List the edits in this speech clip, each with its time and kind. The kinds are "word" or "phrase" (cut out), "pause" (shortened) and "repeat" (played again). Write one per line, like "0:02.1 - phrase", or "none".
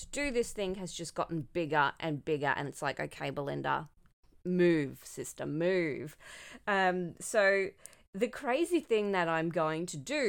none